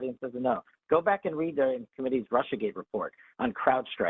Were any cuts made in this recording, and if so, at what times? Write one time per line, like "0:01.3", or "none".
0:01.9